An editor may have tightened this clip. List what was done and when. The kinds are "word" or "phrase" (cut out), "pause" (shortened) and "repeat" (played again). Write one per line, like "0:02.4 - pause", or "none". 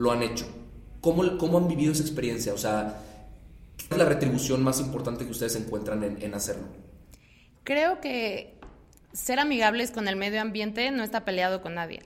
0:03.9 - word
0:06.2 - word